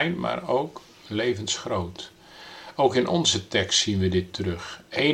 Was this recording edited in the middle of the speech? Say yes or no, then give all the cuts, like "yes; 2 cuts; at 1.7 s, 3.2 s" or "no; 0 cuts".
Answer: no; 0 cuts